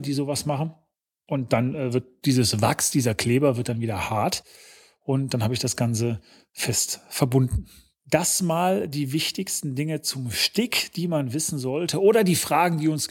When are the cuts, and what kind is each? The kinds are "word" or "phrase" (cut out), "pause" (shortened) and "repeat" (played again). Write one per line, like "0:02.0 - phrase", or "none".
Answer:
none